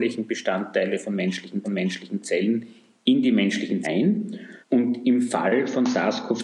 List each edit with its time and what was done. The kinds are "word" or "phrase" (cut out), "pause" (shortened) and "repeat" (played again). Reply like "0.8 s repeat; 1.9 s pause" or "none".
1.6 s repeat; 3.8 s word; 4.6 s pause